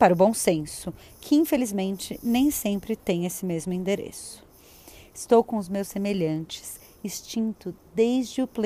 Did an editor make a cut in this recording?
no; 0 cuts

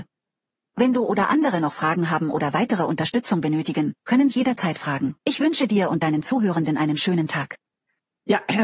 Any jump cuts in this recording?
yes; 2 cuts; at 4.3 s, 5.2 s

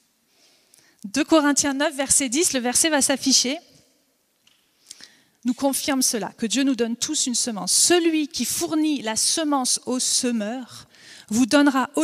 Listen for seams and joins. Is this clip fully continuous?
yes; 0 cuts

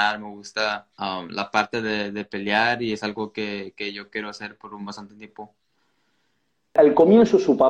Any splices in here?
no; 0 cuts

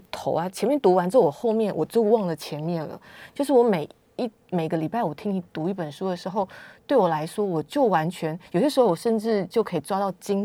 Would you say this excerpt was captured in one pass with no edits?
yes; 0 cuts

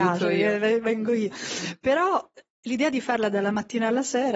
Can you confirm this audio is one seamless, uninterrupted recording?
yes; 0 cuts

